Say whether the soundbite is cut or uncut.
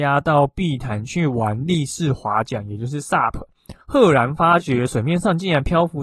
cut